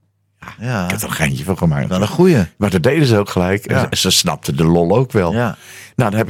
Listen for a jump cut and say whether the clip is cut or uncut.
uncut